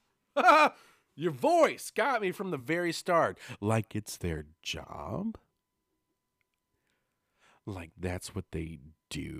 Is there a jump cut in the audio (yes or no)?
no